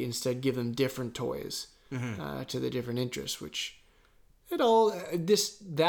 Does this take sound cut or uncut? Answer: uncut